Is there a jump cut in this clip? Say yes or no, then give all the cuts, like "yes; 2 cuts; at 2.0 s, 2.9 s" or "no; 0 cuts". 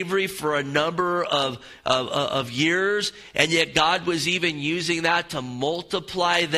no; 0 cuts